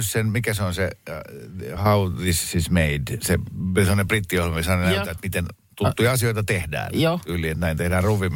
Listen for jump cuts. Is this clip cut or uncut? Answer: uncut